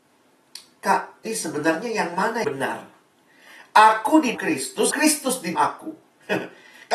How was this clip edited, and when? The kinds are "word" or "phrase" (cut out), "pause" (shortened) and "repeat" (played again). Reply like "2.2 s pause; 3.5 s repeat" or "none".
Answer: 1.2 s word; 2.4 s word; 4.3 s word; 4.9 s word; 5.5 s word